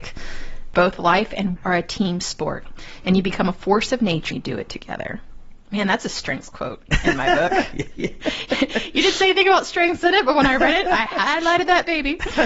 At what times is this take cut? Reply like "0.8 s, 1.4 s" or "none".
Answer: 1.6 s, 4.3 s

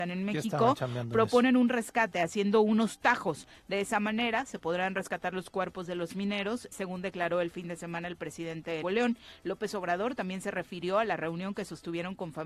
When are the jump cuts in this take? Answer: 6.7 s, 8.8 s

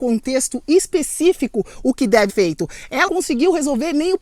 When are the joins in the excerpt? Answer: 2.3 s, 3.1 s

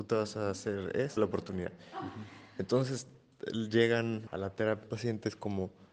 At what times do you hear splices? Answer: 1.2 s, 4.3 s, 4.8 s

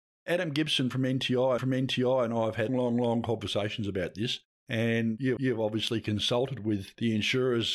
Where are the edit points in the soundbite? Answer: 1.6 s, 2.7 s, 5.4 s

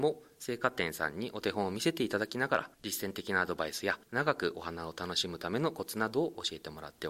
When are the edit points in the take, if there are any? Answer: 2.7 s, 4.0 s

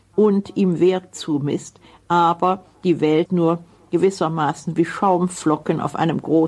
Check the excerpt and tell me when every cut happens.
3.3 s

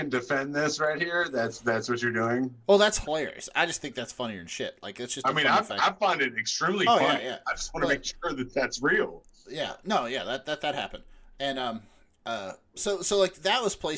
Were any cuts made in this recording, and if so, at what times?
none

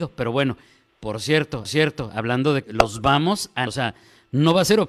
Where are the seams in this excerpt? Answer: 1.6 s, 2.6 s, 3.7 s

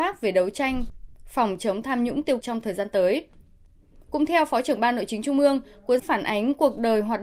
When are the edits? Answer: 2.4 s, 6.0 s

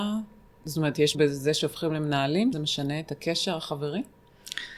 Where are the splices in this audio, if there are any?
1.1 s, 2.5 s

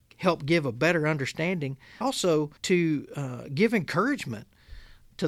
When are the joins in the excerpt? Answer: 2.0 s, 2.6 s

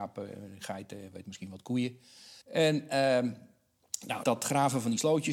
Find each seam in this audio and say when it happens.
1.2 s, 2.4 s, 4.2 s

